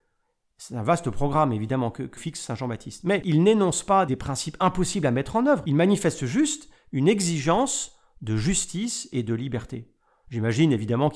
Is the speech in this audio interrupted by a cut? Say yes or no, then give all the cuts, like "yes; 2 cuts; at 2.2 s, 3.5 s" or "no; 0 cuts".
no; 0 cuts